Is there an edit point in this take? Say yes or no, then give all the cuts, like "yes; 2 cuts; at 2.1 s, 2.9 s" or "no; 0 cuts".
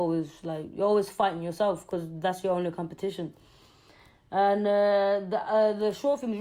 no; 0 cuts